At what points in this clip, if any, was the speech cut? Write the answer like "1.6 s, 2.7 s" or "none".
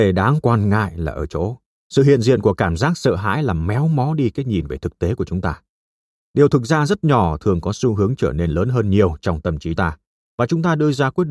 9.8 s